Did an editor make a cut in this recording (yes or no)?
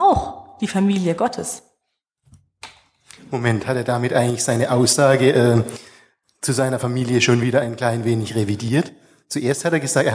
no